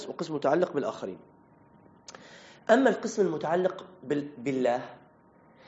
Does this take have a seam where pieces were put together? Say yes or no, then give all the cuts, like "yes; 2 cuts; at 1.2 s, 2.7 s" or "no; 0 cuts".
no; 0 cuts